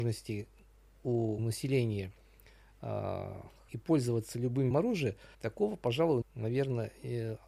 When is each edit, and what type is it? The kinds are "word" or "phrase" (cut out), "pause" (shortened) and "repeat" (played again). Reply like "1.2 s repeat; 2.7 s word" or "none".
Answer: 1.4 s word; 3.7 s word; 4.7 s word; 5.3 s pause; 6.2 s word